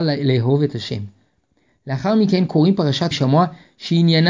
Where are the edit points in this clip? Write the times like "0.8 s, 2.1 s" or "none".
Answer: 3.1 s